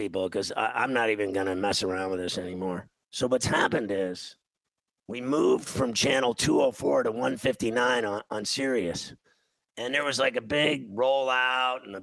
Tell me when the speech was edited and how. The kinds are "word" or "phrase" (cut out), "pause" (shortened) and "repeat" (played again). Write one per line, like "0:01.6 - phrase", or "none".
0:04.7 - pause

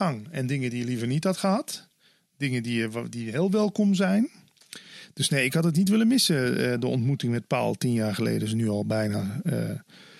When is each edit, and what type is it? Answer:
none

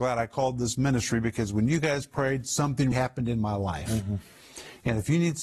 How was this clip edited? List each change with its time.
0:02.9 - word

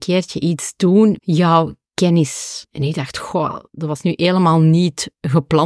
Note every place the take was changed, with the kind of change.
0:01.2 - word

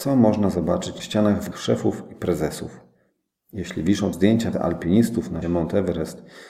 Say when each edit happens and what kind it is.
0:01.0 - word
0:01.5 - word
0:04.1 - word
0:04.5 - word
0:05.4 - word

